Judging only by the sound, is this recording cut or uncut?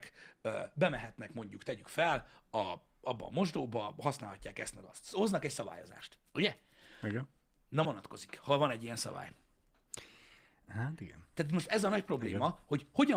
cut